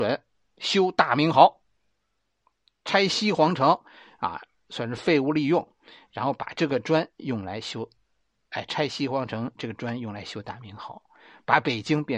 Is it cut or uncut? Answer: uncut